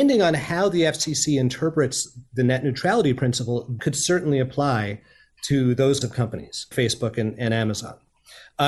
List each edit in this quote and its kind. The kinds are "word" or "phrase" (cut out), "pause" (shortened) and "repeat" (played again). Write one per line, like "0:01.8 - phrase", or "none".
0:03.8 - word
0:06.0 - word
0:06.7 - word